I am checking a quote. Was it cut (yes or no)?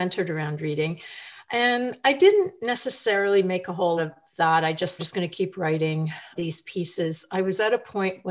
yes